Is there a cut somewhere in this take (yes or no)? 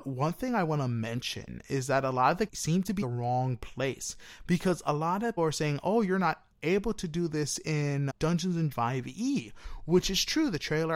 yes